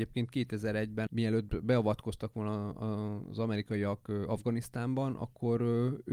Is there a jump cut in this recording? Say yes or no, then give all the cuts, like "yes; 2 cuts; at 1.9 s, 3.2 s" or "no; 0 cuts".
no; 0 cuts